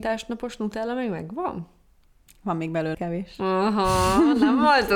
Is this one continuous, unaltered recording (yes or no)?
no